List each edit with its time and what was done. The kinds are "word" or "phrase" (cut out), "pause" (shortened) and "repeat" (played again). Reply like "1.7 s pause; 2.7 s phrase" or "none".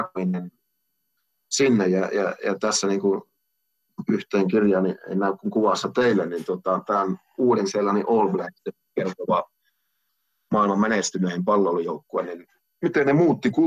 none